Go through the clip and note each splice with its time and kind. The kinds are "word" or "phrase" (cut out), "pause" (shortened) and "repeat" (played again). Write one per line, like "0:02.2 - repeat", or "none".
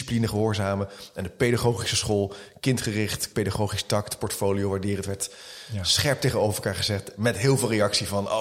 0:03.3 - word